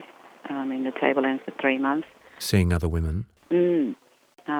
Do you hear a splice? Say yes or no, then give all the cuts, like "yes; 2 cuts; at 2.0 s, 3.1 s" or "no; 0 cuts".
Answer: no; 0 cuts